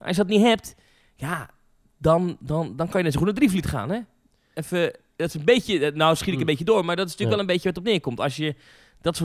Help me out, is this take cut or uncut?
uncut